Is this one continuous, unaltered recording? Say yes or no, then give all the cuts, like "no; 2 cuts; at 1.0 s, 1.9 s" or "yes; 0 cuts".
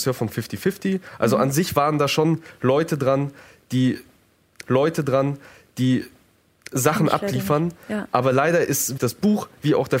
no; 2 cuts; at 4.6 s, 9.0 s